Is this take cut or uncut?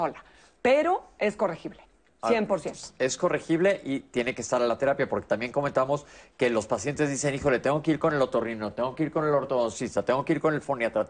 uncut